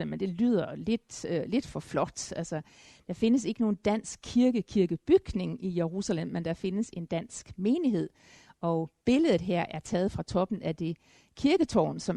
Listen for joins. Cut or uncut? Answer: uncut